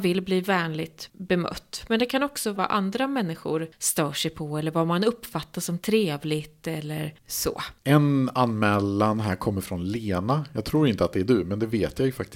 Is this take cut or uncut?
cut